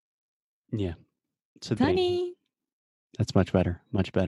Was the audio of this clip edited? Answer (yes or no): yes